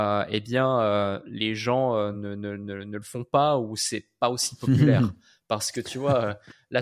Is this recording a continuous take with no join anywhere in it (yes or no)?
yes